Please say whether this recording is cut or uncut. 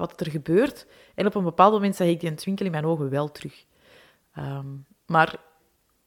uncut